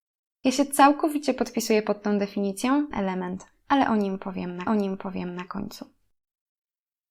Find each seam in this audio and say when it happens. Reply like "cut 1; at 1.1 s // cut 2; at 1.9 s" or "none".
cut 1; at 2.9 s // cut 2; at 4.7 s